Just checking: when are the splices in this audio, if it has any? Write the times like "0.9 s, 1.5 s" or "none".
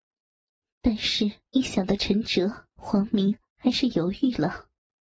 1.5 s, 2.7 s